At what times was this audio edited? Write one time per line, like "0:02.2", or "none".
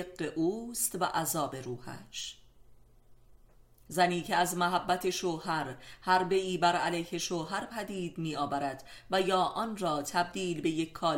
none